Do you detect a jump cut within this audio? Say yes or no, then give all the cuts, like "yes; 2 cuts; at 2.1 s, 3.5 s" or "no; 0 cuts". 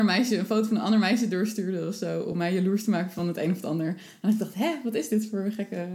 no; 0 cuts